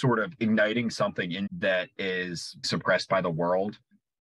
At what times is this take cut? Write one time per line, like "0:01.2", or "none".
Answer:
0:01.5
0:02.6